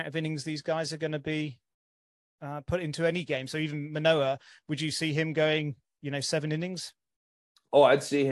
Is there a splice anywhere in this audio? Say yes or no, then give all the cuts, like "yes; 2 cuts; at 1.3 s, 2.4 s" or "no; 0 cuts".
no; 0 cuts